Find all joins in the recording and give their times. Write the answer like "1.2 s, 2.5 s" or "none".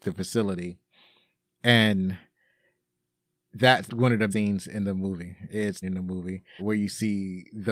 3.9 s, 4.3 s, 5.8 s, 6.6 s